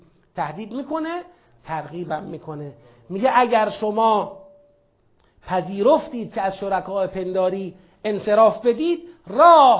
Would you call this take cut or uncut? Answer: uncut